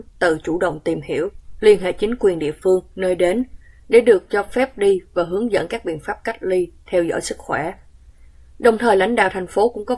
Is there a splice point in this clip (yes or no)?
no